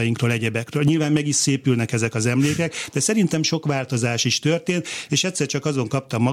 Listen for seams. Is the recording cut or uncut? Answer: uncut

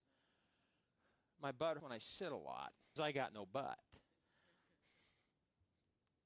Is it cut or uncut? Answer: cut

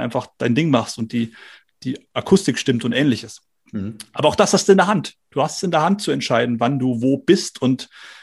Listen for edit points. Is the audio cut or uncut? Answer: uncut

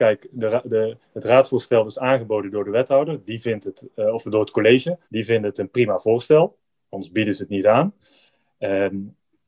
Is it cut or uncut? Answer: cut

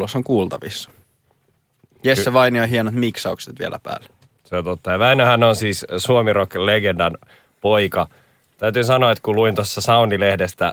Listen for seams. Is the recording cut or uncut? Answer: uncut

